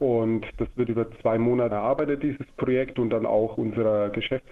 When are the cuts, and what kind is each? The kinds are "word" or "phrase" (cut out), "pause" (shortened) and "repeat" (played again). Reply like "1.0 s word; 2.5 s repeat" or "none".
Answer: 1.7 s word